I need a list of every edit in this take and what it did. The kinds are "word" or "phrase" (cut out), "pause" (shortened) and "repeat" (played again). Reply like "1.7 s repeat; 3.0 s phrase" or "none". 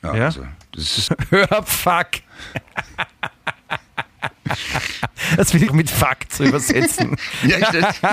1.1 s word; 5.7 s phrase